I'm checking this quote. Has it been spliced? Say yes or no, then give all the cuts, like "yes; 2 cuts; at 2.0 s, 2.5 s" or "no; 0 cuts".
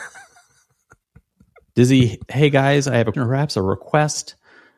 yes; 2 cuts; at 2.3 s, 3.1 s